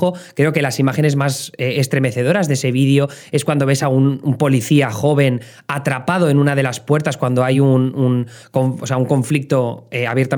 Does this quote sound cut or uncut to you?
uncut